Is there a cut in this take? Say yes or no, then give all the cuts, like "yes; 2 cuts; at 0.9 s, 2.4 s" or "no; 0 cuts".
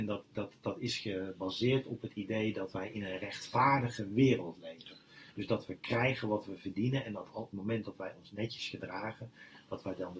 yes; 1 cut; at 7.5 s